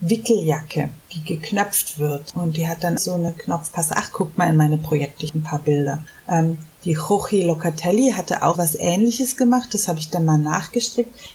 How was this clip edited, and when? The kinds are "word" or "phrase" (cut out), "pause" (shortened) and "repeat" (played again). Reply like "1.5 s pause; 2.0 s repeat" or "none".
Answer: 3.0 s phrase; 8.5 s word